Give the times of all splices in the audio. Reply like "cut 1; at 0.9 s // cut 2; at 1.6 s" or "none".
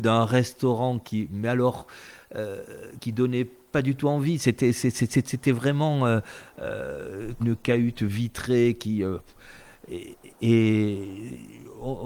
cut 1; at 3.0 s // cut 2; at 7.4 s // cut 3; at 10.3 s